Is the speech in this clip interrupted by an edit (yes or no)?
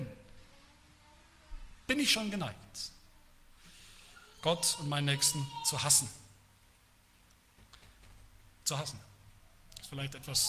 no